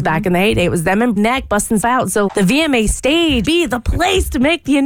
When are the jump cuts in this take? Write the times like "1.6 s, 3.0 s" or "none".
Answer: 1.2 s, 1.8 s, 2.3 s, 3.4 s